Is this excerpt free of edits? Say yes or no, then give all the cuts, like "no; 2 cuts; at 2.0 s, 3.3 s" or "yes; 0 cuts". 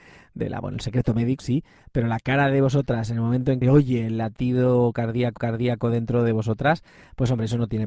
no; 3 cuts; at 1.4 s, 3.6 s, 5.4 s